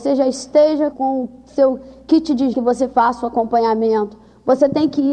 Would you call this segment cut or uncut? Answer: cut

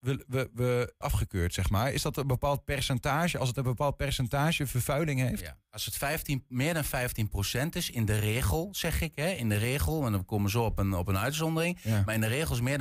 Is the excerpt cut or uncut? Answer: cut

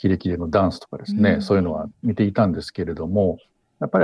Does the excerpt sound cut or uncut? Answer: cut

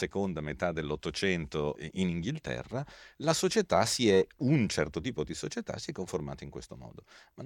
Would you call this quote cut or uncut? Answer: uncut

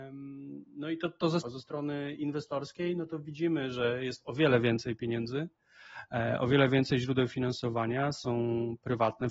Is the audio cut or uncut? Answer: cut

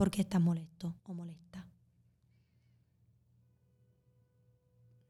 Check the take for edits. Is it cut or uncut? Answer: cut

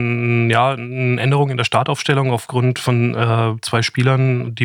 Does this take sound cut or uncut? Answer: uncut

